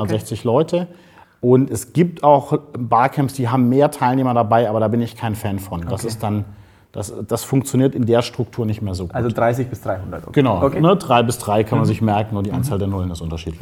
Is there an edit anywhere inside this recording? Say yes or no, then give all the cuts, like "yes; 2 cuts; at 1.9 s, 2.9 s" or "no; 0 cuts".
no; 0 cuts